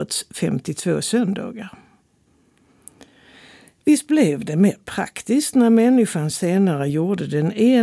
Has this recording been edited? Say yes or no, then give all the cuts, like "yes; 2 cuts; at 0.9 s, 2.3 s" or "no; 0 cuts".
no; 0 cuts